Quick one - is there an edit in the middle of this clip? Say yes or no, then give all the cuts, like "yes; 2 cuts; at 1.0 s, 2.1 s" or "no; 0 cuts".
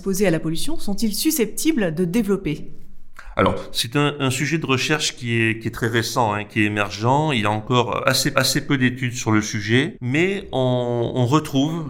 yes; 1 cut; at 8.3 s